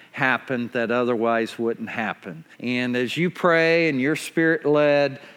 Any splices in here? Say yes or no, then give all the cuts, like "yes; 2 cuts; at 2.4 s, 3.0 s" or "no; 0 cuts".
yes; 1 cut; at 2.5 s